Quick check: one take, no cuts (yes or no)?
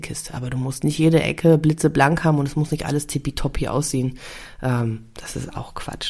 yes